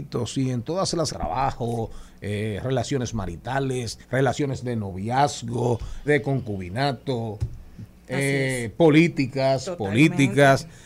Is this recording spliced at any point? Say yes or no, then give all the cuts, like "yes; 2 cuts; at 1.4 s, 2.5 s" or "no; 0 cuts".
yes; 3 cuts; at 1.1 s, 4.0 s, 6.1 s